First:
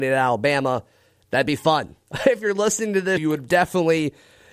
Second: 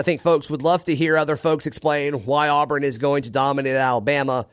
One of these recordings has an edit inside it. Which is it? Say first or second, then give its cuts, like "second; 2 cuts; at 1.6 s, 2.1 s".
first; 1 cut; at 3.2 s